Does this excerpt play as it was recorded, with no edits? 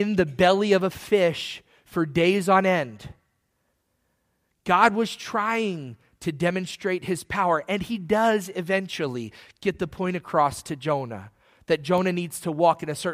yes; 0 cuts

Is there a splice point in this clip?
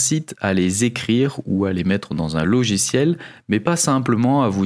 no; 0 cuts

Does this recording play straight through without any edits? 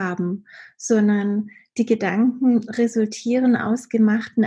yes; 0 cuts

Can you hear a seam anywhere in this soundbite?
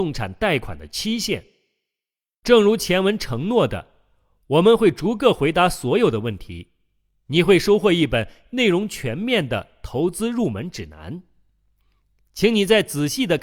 no; 0 cuts

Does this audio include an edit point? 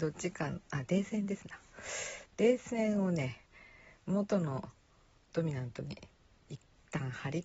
no; 0 cuts

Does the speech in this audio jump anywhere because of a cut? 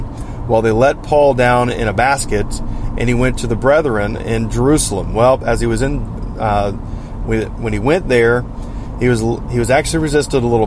no; 0 cuts

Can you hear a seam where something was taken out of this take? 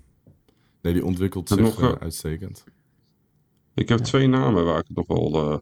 no; 0 cuts

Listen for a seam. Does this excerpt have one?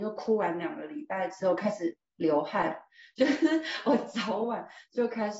no; 0 cuts

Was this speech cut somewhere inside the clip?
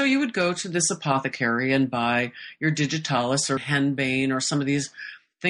yes; 1 cut; at 3.6 s

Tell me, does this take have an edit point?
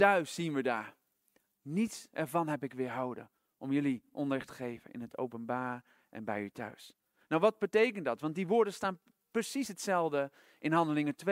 no; 0 cuts

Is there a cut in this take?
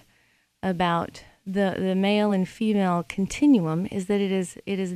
no; 0 cuts

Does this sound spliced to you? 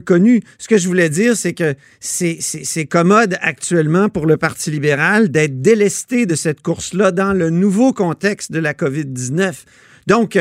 no; 0 cuts

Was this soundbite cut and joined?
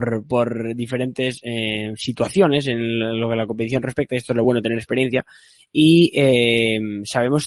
no; 0 cuts

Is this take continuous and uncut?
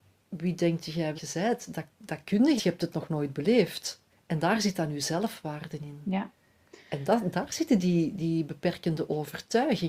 no; 3 cuts; at 1.1 s, 2.6 s, 4.1 s

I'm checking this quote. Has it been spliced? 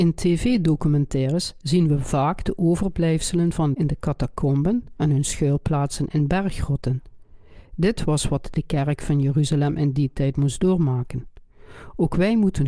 yes; 1 cut; at 3.7 s

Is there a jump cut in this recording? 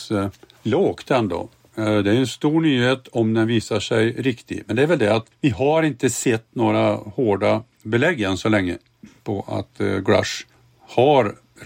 no; 0 cuts

